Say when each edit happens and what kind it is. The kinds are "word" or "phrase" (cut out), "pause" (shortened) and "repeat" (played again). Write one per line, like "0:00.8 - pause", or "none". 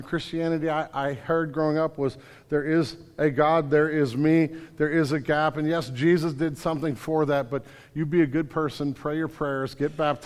none